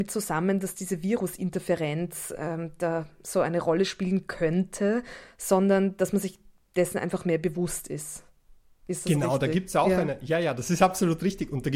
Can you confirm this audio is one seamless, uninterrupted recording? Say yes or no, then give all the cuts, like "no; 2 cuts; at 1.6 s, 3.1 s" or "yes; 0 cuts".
yes; 0 cuts